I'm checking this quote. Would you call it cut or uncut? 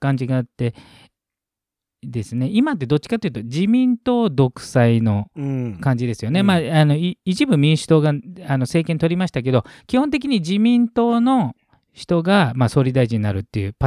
uncut